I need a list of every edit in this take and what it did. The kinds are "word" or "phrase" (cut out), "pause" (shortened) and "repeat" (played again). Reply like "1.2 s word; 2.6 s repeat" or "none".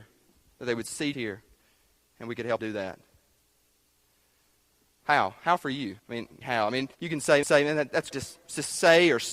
1.1 s word; 2.6 s word; 6.0 s pause; 6.4 s word; 6.9 s pause; 7.4 s repeat; 8.1 s word